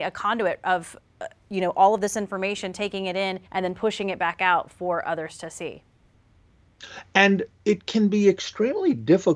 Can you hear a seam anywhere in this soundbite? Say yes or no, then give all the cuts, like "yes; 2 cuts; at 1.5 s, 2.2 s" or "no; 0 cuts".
yes; 2 cuts; at 3.4 s, 7.5 s